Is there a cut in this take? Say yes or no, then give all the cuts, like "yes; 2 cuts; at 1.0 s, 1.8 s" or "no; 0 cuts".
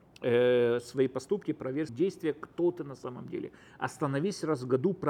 yes; 1 cut; at 1.9 s